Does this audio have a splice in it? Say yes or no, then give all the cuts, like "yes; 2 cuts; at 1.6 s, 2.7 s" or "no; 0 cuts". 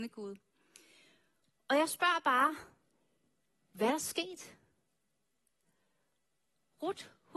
no; 0 cuts